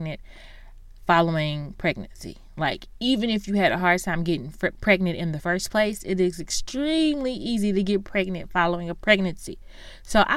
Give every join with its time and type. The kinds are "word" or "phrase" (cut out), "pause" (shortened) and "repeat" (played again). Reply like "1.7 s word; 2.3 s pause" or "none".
none